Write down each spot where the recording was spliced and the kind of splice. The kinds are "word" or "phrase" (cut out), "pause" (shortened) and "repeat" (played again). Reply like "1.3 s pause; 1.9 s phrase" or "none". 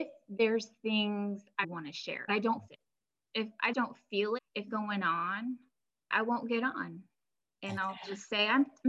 1.6 s word; 2.3 s word; 2.7 s word; 3.7 s word; 4.4 s word; 4.7 s word; 6.1 s word